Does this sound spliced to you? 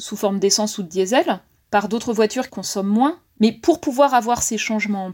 yes; 2 cuts; at 1.6 s, 2.5 s

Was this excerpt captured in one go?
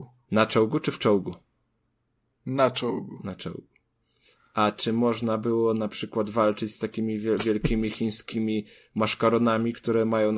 yes; 0 cuts

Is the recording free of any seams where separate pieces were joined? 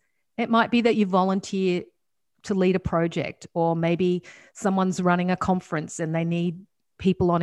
yes; 0 cuts

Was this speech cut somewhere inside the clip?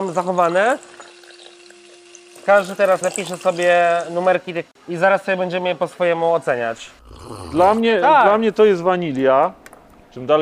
yes; 2 cuts; at 3.0 s, 4.7 s

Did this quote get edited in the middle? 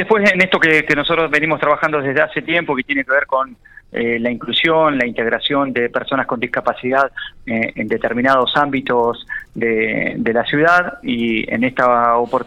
no; 0 cuts

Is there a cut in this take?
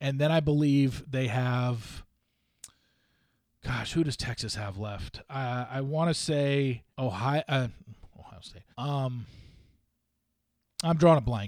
yes; 2 cuts; at 6.9 s, 8.7 s

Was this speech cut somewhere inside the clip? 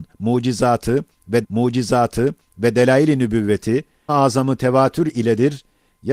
yes; 2 cuts; at 1.4 s, 4.1 s

